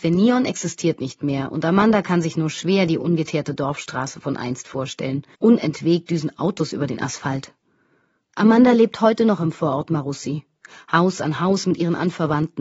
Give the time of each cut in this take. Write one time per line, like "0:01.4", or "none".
0:05.3